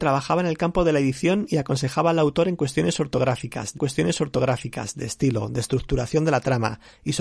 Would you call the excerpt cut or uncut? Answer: cut